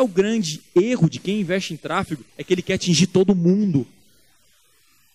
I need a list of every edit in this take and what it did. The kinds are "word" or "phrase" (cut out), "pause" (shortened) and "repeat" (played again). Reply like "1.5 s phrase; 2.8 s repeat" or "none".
2.3 s pause